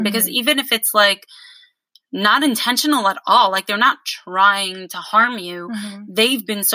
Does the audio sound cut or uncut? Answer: uncut